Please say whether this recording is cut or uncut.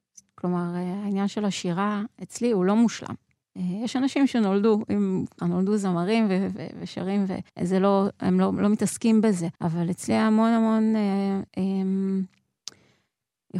cut